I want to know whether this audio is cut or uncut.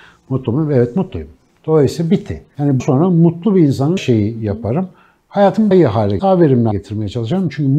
cut